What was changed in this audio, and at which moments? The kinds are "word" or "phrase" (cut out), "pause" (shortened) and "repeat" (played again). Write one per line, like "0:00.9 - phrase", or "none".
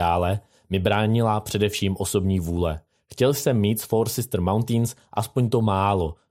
0:02.9 - pause

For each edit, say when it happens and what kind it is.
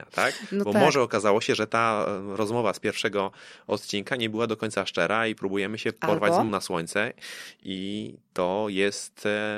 0:06.5 - word

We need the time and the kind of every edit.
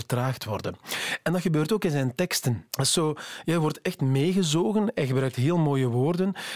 0:02.7 - pause

